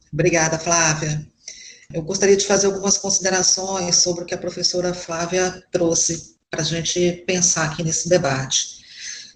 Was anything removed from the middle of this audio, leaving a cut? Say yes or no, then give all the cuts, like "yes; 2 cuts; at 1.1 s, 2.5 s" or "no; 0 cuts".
no; 0 cuts